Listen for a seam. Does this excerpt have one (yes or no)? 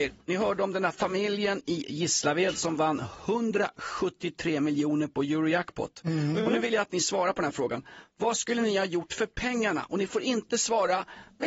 no